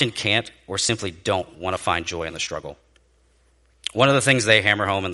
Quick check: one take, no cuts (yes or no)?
yes